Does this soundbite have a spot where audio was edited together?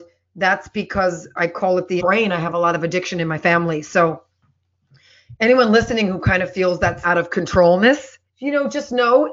yes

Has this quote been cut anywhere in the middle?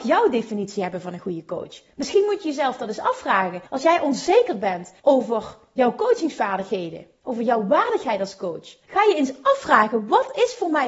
yes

